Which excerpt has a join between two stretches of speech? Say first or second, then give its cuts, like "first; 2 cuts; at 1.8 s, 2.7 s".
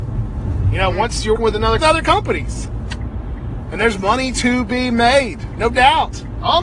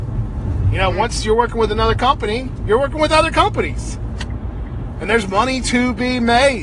first; 2 cuts; at 1.4 s, 1.8 s